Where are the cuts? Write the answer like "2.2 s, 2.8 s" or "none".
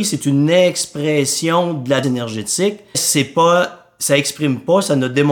2.0 s, 2.9 s